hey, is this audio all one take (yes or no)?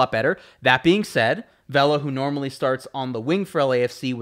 yes